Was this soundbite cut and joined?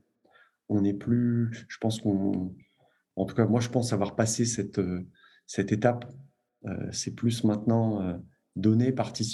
no; 0 cuts

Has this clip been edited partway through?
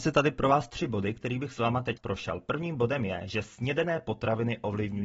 yes; 1 cut; at 2.0 s

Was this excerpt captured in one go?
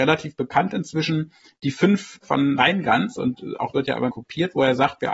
no; 4 cuts; at 2.2 s, 2.6 s, 3.7 s, 4.1 s

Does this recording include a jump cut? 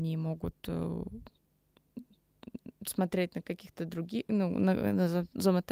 no; 0 cuts

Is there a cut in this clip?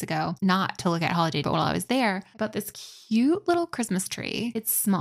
yes; 1 cut; at 1.4 s

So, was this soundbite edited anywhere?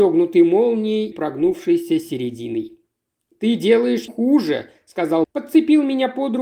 yes; 3 cuts; at 1.1 s, 4.1 s, 5.2 s

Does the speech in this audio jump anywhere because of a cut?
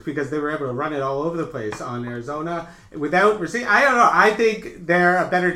no; 0 cuts

